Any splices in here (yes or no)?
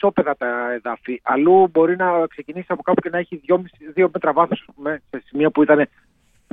no